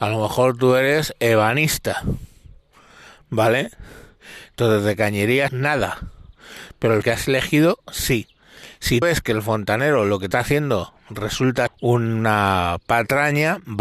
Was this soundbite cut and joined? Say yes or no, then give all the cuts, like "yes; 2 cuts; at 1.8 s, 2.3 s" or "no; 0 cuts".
yes; 5 cuts; at 5.5 s, 7.0 s, 9.0 s, 10.3 s, 11.7 s